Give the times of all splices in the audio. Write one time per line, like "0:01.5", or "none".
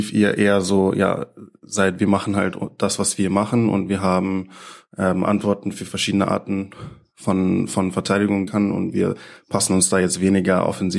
0:08.5